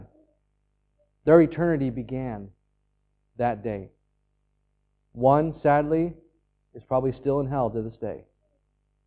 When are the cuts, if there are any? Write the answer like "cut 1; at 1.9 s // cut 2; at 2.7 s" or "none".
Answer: none